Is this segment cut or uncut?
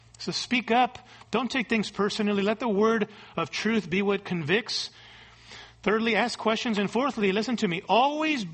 uncut